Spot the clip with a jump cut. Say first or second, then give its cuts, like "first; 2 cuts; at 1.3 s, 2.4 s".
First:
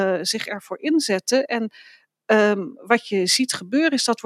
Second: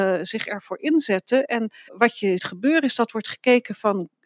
second; 2 cuts; at 1.9 s, 2.4 s